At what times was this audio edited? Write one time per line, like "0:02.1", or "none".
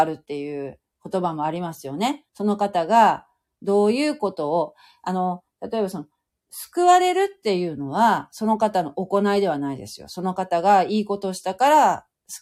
0:02.3